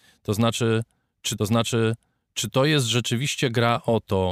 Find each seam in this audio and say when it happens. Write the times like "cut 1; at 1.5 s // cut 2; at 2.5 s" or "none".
cut 1; at 1.4 s